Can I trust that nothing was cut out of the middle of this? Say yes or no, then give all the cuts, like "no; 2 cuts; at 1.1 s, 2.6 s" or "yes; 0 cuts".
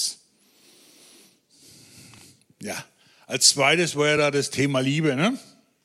yes; 0 cuts